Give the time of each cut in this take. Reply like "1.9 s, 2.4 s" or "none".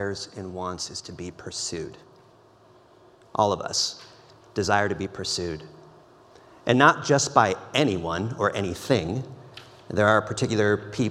none